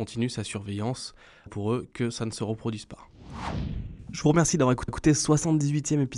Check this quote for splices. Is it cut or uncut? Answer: cut